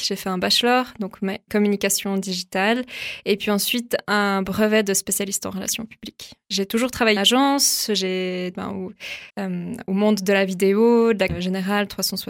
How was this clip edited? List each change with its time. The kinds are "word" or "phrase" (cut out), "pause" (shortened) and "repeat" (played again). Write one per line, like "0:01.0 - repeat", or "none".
0:01.5 - word
0:07.2 - word
0:08.5 - word
0:09.3 - pause
0:11.3 - phrase